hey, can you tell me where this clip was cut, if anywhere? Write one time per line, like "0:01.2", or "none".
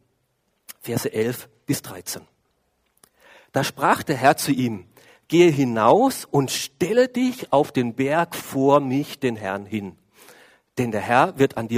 none